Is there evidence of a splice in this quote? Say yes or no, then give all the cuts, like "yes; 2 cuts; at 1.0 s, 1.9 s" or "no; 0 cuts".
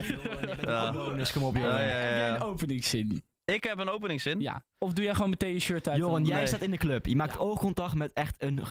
no; 0 cuts